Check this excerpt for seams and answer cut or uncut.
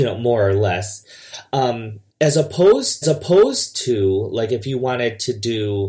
cut